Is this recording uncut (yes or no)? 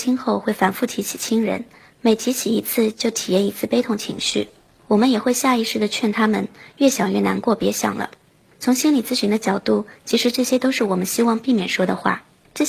yes